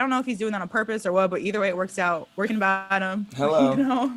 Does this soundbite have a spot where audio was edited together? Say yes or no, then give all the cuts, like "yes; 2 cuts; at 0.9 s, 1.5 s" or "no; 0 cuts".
yes; 1 cut; at 2.5 s